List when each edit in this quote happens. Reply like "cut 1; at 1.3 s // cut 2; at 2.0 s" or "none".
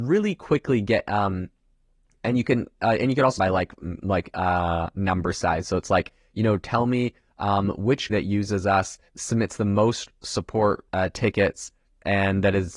cut 1; at 3.4 s // cut 2; at 8.1 s // cut 3; at 10.9 s